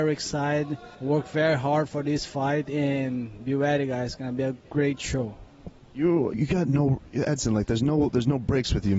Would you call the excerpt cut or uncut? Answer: cut